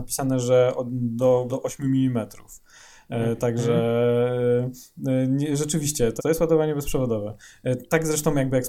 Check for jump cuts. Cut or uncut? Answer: cut